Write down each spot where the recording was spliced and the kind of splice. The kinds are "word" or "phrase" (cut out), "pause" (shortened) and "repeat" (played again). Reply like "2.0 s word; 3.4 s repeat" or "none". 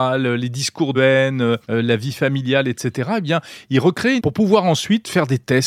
0.9 s word; 1.6 s pause; 4.2 s phrase